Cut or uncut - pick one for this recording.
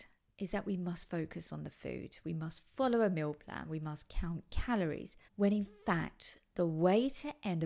cut